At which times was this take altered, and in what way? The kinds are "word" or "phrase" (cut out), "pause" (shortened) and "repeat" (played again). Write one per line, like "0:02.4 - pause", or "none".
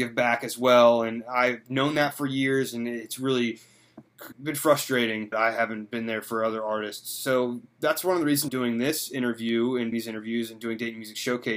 0:04.3 - word
0:05.3 - phrase
0:08.5 - word
0:09.9 - word

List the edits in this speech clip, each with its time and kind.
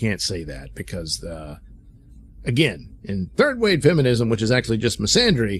none

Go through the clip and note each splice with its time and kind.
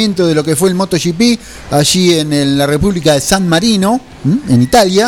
none

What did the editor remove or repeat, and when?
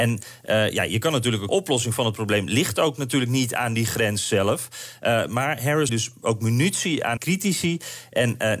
0:01.5 - phrase
0:05.9 - phrase
0:07.2 - word

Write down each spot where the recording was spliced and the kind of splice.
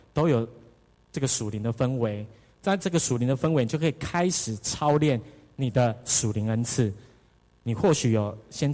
none

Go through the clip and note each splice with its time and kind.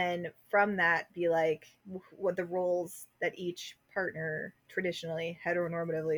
none

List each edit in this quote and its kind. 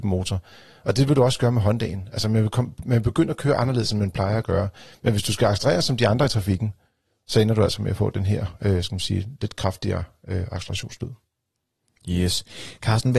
none

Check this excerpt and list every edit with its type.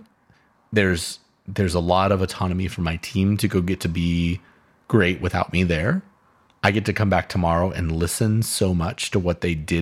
none

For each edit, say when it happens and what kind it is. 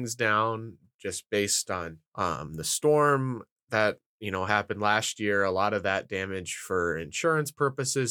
0:02.1 - pause

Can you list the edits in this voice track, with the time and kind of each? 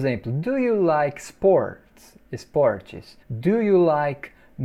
0:03.2 - pause

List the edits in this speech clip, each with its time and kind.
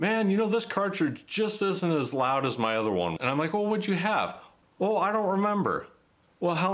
0:03.2 - word

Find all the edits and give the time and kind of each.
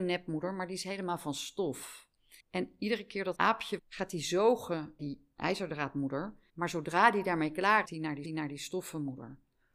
0:02.4 - pause
0:03.3 - word
0:03.8 - phrase
0:05.0 - word
0:06.5 - pause
0:07.8 - phrase
0:08.2 - repeat

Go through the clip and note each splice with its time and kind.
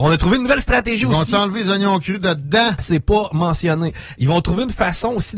none

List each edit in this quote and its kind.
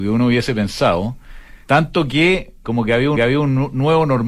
0:01.6 - pause
0:02.6 - word
0:03.1 - repeat

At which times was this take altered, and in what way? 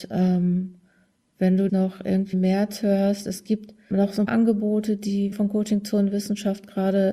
0:01.7 - phrase
0:02.3 - word
0:03.9 - word
0:04.3 - word
0:05.3 - word

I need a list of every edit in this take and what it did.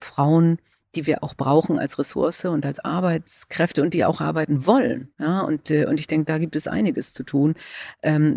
0:05.1 - pause

